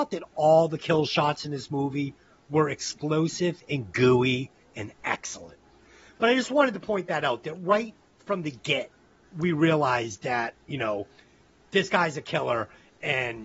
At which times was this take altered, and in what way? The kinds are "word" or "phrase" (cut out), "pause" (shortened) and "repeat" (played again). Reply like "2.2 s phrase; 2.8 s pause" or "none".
none